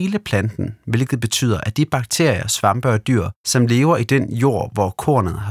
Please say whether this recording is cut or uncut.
uncut